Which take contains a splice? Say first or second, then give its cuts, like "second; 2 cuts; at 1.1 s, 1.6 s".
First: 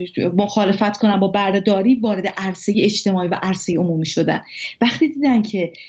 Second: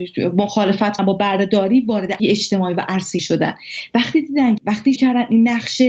second; 5 cuts; at 1.0 s, 2.2 s, 3.2 s, 4.6 s, 5.0 s